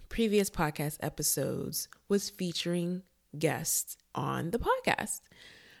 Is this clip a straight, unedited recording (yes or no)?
no